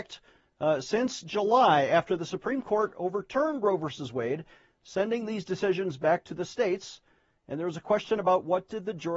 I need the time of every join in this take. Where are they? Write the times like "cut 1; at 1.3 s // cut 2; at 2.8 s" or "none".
none